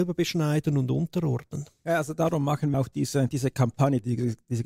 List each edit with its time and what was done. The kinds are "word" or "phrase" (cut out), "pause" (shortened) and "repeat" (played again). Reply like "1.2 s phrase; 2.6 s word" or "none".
2.7 s word

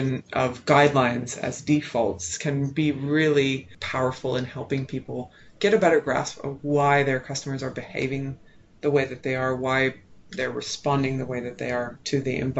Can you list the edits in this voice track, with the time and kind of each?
none

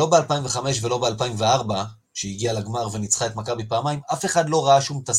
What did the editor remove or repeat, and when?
none

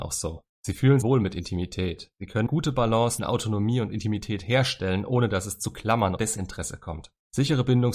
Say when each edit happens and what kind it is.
1.0 s word; 2.5 s word; 3.2 s word; 6.2 s word

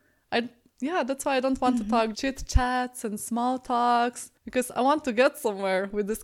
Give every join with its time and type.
2.1 s word; 4.4 s pause

